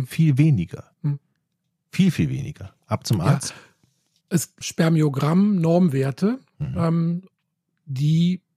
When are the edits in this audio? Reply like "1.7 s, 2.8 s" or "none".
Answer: 0.9 s, 4.6 s